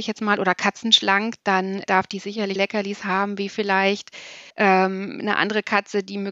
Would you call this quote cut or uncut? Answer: cut